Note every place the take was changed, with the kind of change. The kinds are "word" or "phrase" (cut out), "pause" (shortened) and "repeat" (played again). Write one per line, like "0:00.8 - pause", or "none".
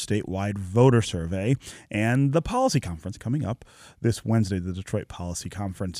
none